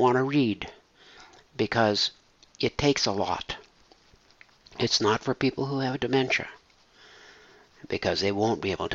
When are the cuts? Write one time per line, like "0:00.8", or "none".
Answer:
none